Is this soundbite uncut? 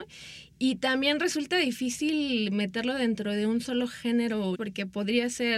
no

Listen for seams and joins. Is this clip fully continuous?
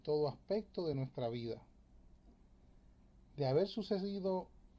yes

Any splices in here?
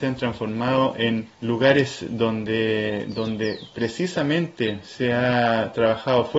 no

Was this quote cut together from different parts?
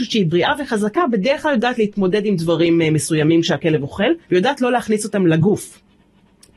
yes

